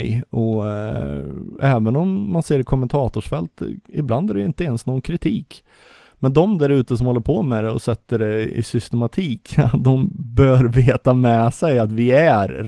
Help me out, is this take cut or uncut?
uncut